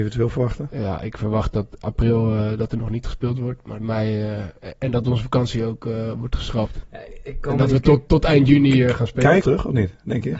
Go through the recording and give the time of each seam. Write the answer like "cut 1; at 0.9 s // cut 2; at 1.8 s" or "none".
cut 1; at 3.8 s // cut 2; at 9.4 s

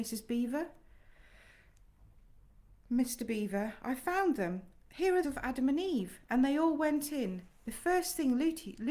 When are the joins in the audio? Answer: cut 1; at 5.2 s

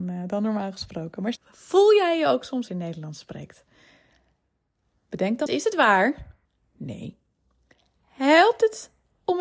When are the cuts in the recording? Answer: cut 1; at 1.4 s // cut 2; at 2.7 s // cut 3; at 5.5 s // cut 4; at 6.5 s

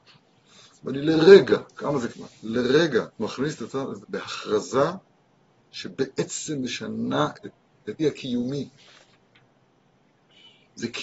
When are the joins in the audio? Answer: cut 1; at 1.7 s // cut 2; at 2.1 s // cut 3; at 3.1 s // cut 4; at 4.0 s // cut 5; at 7.4 s // cut 6; at 8.0 s

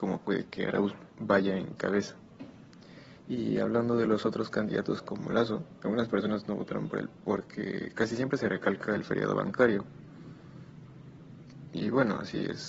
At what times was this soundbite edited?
cut 1; at 1.1 s // cut 2; at 3.2 s // cut 3; at 5.8 s

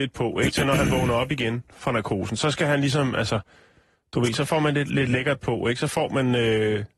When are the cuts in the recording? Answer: none

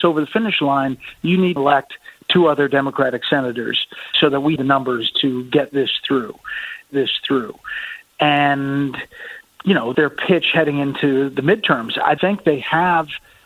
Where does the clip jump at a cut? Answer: cut 1; at 1.6 s // cut 2; at 4.1 s // cut 3; at 4.6 s // cut 4; at 6.9 s // cut 5; at 9.9 s // cut 6; at 12.2 s

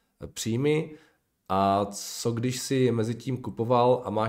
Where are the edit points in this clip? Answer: none

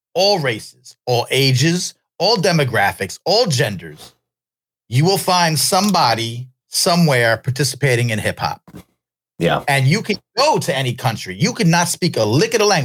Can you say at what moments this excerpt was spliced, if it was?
none

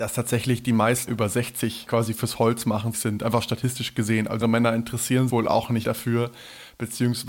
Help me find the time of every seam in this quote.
cut 1; at 1.1 s // cut 2; at 1.9 s // cut 3; at 2.9 s // cut 4; at 4.4 s // cut 5; at 5.3 s // cut 6; at 5.8 s

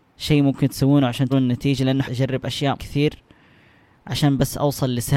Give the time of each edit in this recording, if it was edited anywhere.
cut 1; at 1.3 s // cut 2; at 2.1 s // cut 3; at 2.8 s

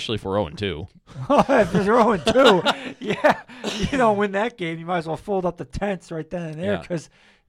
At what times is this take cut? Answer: none

